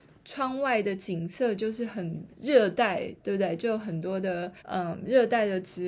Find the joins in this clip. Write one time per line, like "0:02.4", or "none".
0:03.2
0:04.6